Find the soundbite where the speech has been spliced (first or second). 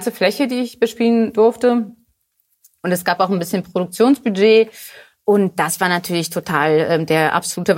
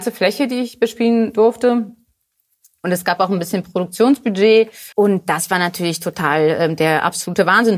second